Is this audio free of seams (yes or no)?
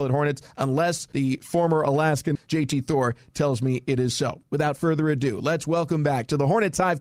yes